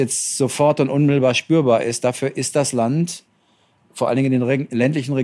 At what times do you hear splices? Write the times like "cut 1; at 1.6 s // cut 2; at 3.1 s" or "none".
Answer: none